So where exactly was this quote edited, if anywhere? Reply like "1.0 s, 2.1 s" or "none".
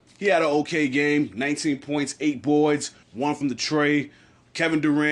3.0 s, 3.4 s